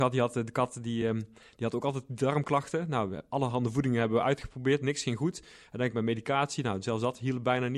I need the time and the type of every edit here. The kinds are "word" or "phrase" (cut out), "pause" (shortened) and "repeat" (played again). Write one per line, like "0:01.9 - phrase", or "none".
none